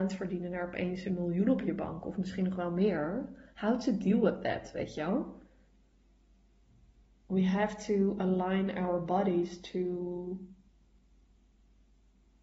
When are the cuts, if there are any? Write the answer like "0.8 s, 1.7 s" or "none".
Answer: none